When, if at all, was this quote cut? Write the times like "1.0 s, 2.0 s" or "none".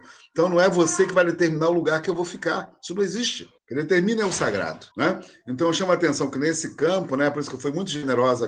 3.6 s, 4.9 s